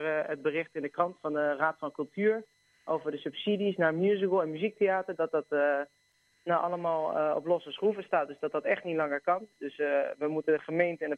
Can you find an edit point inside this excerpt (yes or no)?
no